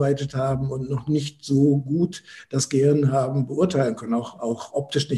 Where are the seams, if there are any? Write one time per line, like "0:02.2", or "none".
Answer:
none

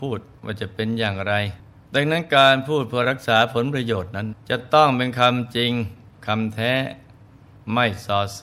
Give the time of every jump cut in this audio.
0:01.7
0:04.4

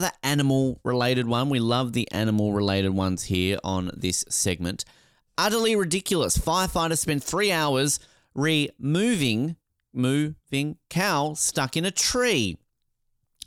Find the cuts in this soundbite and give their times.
none

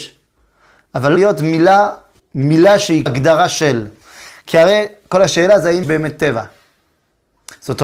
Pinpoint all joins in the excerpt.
0:01.2
0:02.2
0:03.1
0:05.8

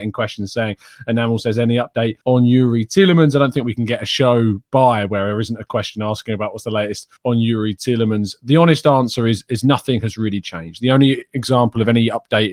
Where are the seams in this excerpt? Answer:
0:02.2
0:07.2

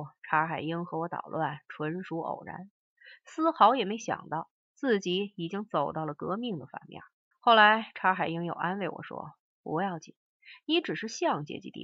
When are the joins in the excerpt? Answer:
0:07.3

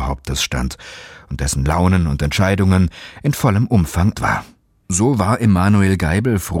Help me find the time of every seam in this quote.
0:04.1

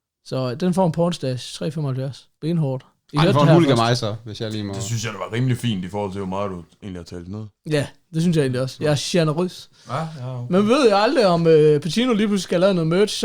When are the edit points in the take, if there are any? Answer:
0:02.4

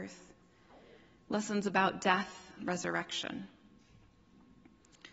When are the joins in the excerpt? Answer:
0:02.6

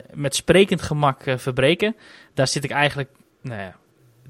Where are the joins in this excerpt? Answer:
none

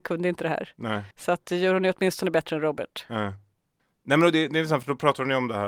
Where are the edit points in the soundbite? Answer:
0:01.1
0:03.8

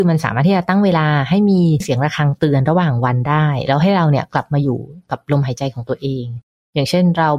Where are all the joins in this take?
none

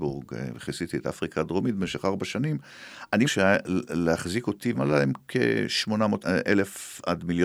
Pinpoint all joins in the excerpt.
0:03.2
0:04.7
0:06.2

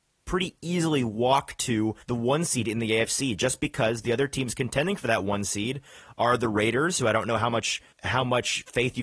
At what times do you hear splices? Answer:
0:02.0
0:07.9

